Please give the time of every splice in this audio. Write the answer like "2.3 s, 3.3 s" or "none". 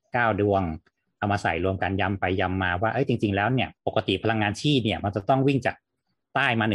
3.8 s